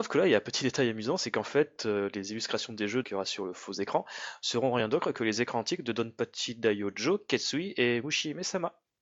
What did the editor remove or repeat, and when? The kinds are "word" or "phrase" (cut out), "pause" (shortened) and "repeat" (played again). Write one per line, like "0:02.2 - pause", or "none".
0:03.0 - word